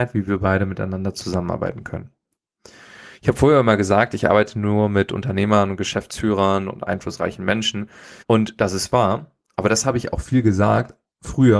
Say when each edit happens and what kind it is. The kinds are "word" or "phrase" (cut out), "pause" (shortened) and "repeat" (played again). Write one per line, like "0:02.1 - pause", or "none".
0:08.2 - pause
0:09.4 - pause